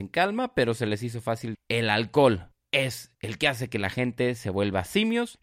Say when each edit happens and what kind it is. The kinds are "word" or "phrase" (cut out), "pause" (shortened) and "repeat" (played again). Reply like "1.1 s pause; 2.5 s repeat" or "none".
1.5 s word